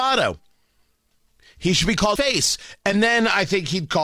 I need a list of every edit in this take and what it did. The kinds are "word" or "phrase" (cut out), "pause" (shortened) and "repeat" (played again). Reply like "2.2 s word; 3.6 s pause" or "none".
2.2 s phrase